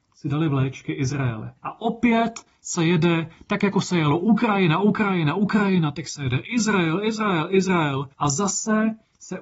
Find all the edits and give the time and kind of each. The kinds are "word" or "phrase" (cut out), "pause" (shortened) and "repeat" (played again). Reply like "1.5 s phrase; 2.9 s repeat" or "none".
1.6 s pause; 8.1 s pause